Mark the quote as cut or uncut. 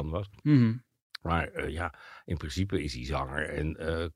uncut